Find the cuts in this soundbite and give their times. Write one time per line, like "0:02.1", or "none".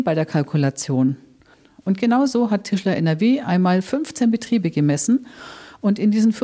none